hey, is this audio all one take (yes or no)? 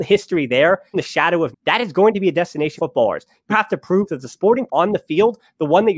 no